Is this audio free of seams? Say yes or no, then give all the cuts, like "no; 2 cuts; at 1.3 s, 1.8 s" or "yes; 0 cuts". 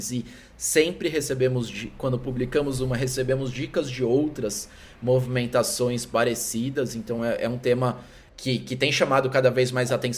yes; 0 cuts